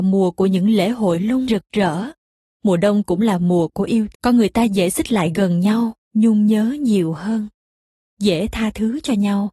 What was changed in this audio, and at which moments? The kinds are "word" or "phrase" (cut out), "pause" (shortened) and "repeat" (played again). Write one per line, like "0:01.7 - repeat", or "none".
0:01.5 - word
0:02.2 - pause
0:04.1 - word
0:06.0 - pause